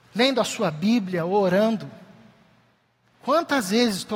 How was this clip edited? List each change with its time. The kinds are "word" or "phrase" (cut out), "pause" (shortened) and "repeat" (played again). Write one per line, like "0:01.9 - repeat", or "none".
none